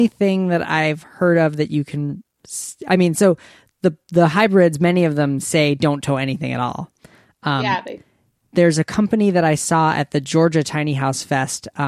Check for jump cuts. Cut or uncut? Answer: uncut